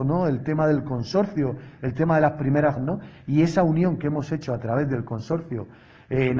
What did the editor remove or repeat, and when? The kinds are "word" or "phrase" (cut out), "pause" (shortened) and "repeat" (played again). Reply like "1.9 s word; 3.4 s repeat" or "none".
2.8 s word